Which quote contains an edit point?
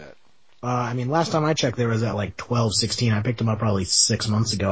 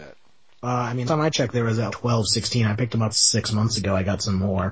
second; 3 cuts; at 1.1 s, 1.9 s, 3.1 s

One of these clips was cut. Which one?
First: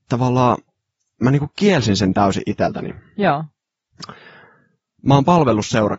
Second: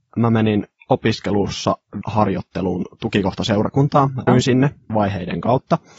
second; 3 cuts; at 2.0 s, 4.3 s, 4.9 s

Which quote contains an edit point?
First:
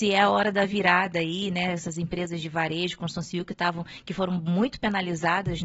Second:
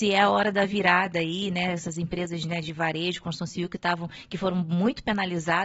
first; 1 cut; at 2.4 s

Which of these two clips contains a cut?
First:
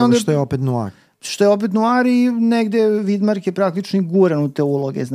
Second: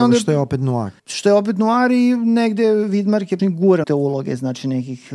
second; 3 cuts; at 1.0 s, 3.4 s, 3.8 s

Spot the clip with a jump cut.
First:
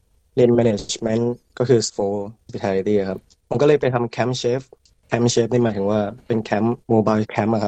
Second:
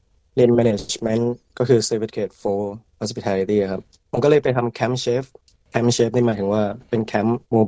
first; 2 cuts; at 1.9 s, 2.5 s

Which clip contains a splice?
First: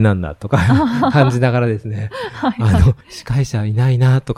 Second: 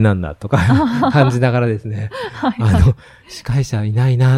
first; 1 cut; at 3.0 s

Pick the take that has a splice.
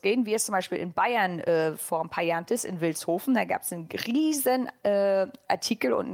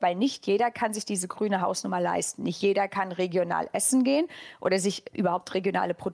first; 1 cut; at 2.5 s

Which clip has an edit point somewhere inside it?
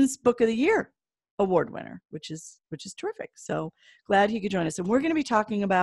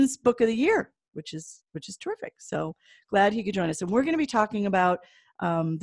second; 1 cut; at 1.1 s

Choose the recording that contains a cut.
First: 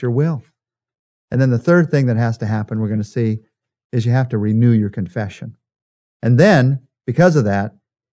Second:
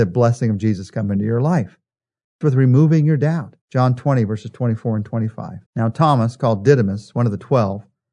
second; 3 cuts; at 2.4 s, 3.6 s, 5.7 s

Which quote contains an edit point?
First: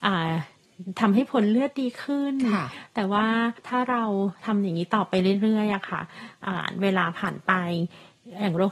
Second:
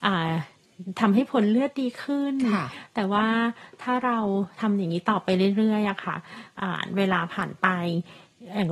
first; 1 cut; at 3.6 s

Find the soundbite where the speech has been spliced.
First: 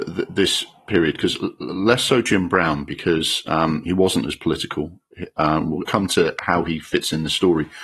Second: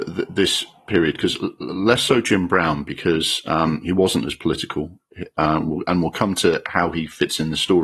first; 1 cut; at 5.9 s

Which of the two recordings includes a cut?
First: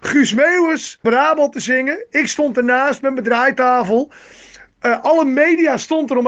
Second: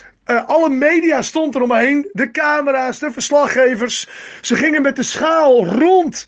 first; 1 cut; at 1.0 s

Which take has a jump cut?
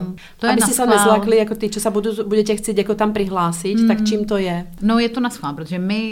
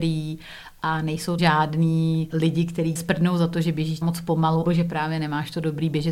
second; 5 cuts; at 1.4 s, 2.3 s, 3.0 s, 4.0 s, 4.7 s

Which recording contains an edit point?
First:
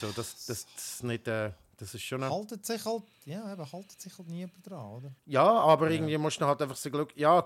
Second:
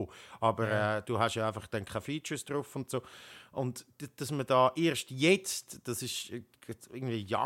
first; 1 cut; at 5.2 s

